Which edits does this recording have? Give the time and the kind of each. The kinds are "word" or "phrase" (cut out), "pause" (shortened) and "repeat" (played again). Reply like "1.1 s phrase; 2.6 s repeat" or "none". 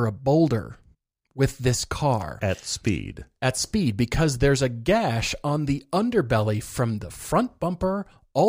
0.9 s pause